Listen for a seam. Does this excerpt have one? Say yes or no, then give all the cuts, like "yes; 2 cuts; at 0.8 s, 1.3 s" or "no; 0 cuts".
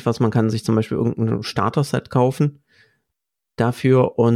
no; 0 cuts